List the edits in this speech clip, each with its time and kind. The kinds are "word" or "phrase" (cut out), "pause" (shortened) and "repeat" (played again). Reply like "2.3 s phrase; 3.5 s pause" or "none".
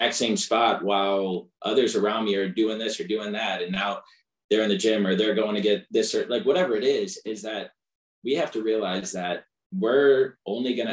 none